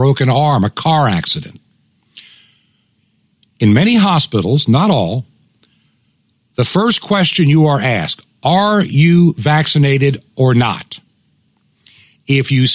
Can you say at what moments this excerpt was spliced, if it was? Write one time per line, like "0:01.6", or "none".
none